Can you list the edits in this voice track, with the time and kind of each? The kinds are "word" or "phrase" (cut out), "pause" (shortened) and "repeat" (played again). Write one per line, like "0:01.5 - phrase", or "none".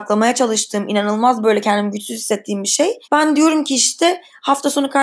0:03.0 - pause